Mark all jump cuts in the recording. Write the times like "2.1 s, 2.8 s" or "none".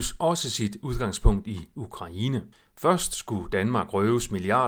2.5 s